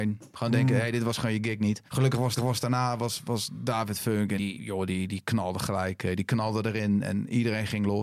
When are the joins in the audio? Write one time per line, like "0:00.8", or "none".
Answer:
0:01.9
0:02.4
0:04.4